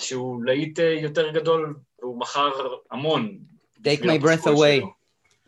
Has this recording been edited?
yes; 2 cuts; at 2.0 s, 2.8 s

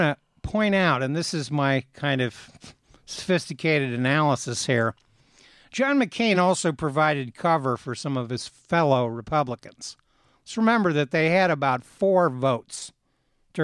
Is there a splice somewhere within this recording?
no; 0 cuts

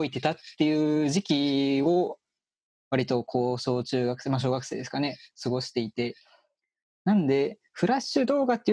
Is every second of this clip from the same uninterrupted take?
yes; 0 cuts

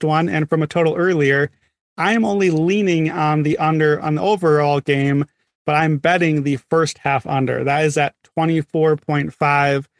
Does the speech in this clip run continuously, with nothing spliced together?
yes; 0 cuts

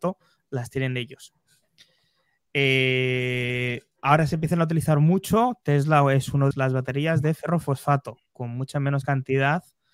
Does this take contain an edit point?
yes; 1 cut; at 6.5 s

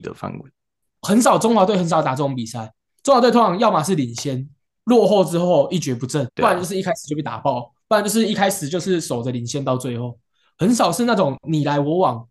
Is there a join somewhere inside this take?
yes; 1 cut; at 6.3 s

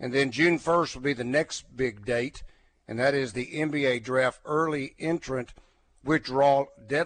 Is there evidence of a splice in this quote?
no; 0 cuts

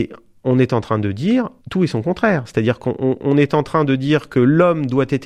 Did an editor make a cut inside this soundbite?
yes; 1 cut; at 1.6 s

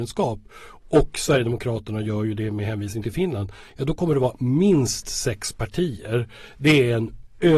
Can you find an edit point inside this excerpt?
no; 0 cuts

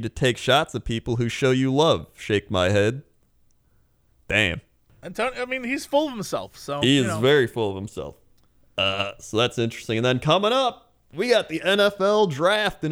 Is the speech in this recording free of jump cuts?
yes; 0 cuts

